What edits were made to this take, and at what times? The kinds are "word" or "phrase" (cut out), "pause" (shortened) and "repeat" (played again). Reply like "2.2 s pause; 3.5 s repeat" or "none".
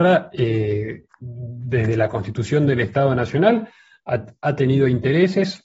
none